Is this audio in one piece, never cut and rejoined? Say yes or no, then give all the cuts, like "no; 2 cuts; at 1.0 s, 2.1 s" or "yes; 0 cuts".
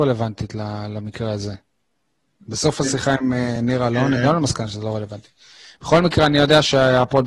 yes; 0 cuts